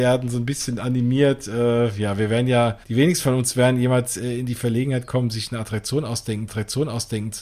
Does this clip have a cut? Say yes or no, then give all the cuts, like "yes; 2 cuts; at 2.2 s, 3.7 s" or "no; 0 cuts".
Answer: yes; 2 cuts; at 2.8 s, 6.5 s